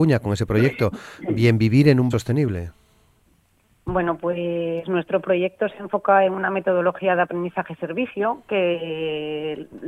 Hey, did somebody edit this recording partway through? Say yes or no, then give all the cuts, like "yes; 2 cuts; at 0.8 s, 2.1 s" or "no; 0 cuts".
yes; 1 cut; at 2.1 s